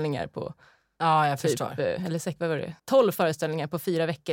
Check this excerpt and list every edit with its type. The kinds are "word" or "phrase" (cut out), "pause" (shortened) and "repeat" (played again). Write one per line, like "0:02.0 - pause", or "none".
0:02.8 - pause

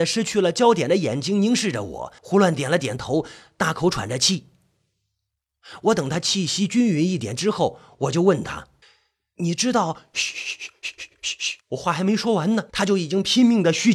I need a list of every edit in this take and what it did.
0:02.2 - pause
0:08.8 - pause
0:11.6 - pause
0:12.7 - pause

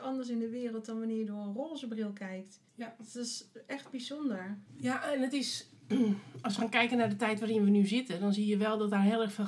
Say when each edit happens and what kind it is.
0:02.7 - pause
0:04.7 - pause

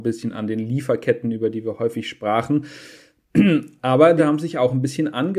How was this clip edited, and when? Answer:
0:04.2 - word

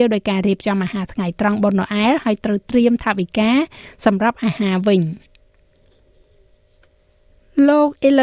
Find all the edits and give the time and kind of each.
none

